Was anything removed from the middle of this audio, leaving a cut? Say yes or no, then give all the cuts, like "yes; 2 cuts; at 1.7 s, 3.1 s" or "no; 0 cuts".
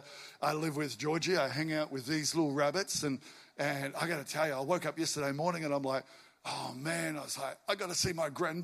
no; 0 cuts